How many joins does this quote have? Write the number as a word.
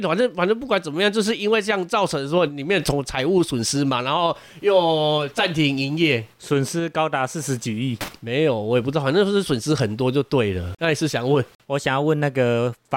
two